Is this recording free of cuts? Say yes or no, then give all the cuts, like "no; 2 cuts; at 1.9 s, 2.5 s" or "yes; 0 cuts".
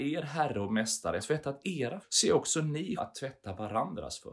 no; 3 cuts; at 1.2 s, 2.0 s, 3.0 s